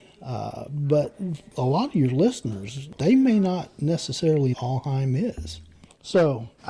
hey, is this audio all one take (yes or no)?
no